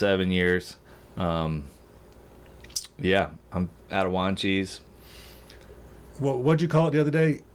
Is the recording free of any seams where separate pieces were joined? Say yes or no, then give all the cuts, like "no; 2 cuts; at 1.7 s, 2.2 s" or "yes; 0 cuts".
no; 1 cut; at 0.9 s